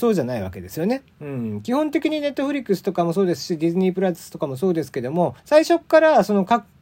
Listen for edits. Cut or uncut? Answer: cut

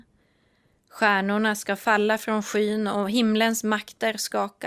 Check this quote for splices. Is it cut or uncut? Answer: uncut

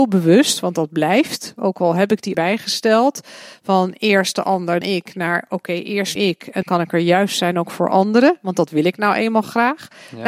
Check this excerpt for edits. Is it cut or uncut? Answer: cut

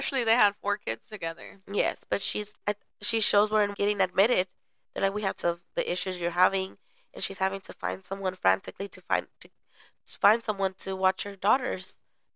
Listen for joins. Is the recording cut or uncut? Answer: cut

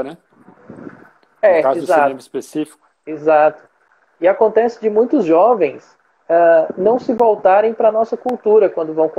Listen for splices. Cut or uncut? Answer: uncut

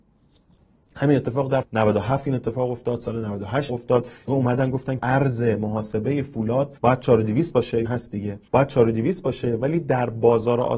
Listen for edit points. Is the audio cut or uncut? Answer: cut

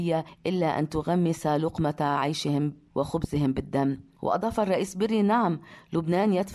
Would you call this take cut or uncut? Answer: uncut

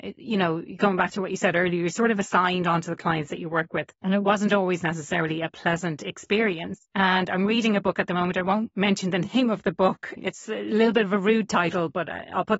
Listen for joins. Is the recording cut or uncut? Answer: cut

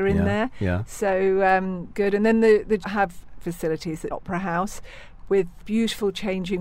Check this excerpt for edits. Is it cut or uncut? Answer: cut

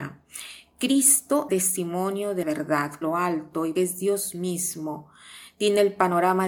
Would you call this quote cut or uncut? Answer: cut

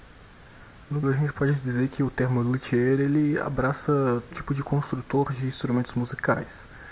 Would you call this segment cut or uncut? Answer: cut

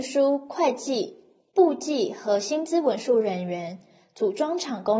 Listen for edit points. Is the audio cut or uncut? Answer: uncut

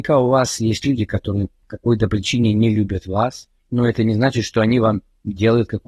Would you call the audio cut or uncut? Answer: cut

